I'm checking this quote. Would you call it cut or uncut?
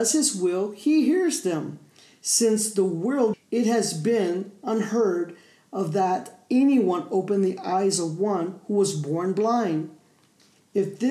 cut